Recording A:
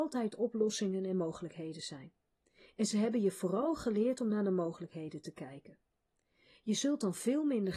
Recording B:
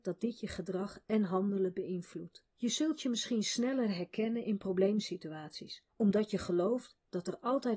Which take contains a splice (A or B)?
B